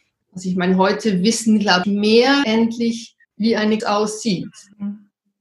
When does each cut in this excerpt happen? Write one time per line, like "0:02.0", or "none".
0:01.8
0:02.4
0:03.2
0:03.8